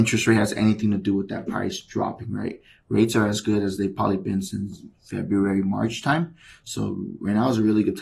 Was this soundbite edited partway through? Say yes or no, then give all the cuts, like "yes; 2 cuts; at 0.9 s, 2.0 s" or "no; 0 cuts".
no; 0 cuts